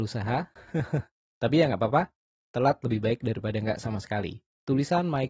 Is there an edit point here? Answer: no; 0 cuts

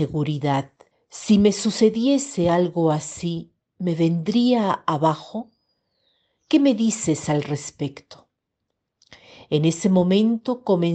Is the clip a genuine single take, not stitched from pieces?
no; 1 cut; at 0.9 s

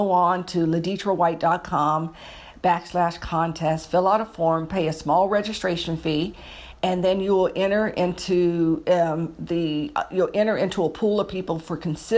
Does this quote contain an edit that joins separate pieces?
no; 0 cuts

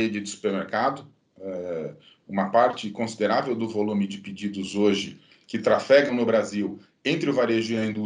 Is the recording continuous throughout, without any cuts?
yes; 0 cuts

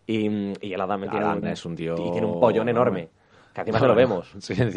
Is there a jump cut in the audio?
yes; 2 cuts; at 1.1 s, 1.4 s

